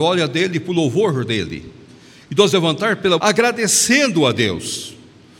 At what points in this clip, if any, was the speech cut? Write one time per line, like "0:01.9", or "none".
0:02.5
0:03.2